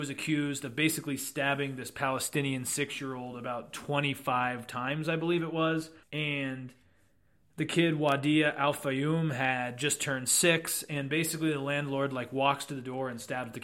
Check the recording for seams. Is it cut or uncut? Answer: cut